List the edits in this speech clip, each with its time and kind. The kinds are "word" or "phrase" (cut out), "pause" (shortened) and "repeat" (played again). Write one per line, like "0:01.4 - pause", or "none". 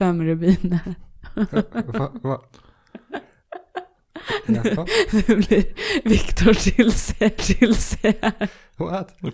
0:07.4 - repeat